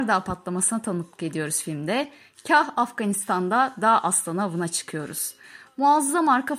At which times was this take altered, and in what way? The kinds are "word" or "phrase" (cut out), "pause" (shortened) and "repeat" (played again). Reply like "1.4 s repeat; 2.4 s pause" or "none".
none